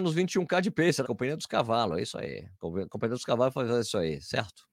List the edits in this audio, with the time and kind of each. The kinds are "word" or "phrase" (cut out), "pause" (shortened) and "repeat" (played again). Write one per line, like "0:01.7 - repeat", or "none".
0:01.0 - word
0:02.5 - pause